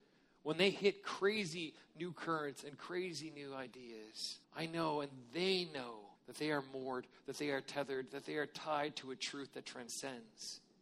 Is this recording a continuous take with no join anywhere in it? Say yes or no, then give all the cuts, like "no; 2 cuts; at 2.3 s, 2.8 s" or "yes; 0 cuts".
no; 2 cuts; at 4.4 s, 6.1 s